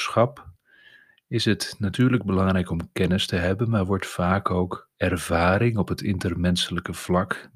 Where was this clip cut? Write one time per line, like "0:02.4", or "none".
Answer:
0:04.9